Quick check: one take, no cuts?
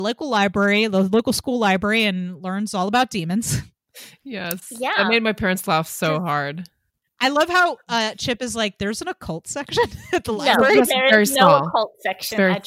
yes; 0 cuts

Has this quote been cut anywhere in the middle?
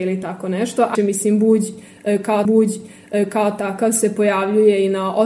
yes; 2 cuts; at 0.9 s, 2.4 s

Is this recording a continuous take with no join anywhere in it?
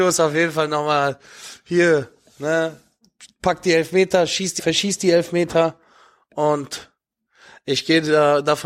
no; 1 cut; at 4.6 s

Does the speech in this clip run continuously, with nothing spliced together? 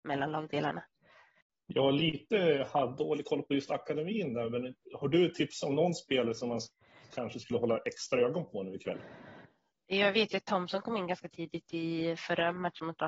yes; 0 cuts

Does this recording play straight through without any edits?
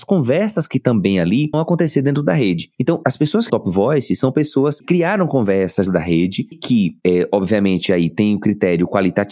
no; 5 cuts; at 1.5 s, 3.5 s, 4.8 s, 5.9 s, 6.5 s

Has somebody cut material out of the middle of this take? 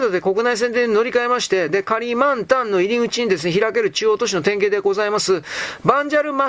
no; 0 cuts

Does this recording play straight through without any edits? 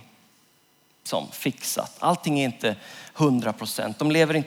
yes; 0 cuts

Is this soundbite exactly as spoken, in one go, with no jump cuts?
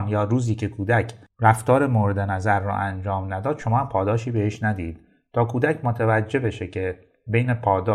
yes; 0 cuts

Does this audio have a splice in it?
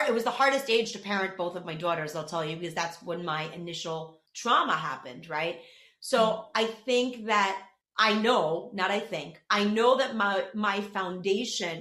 no; 0 cuts

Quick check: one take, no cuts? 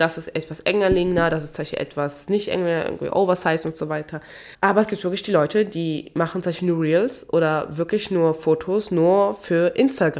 no; 1 cut; at 4.5 s

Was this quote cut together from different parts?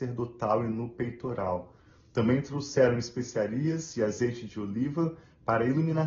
no; 0 cuts

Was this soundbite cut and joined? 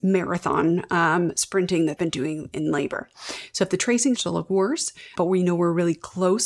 yes; 3 cuts; at 2.0 s, 4.2 s, 5.2 s

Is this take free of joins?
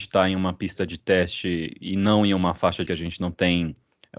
no; 1 cut; at 2.9 s

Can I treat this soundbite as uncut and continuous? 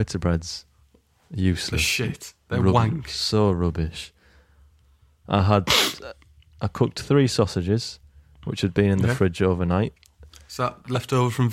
yes; 0 cuts

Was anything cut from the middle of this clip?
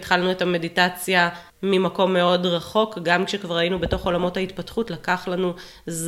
yes; 1 cut; at 1.5 s

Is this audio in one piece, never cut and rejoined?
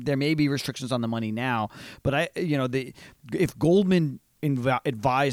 no; 1 cut; at 4.3 s

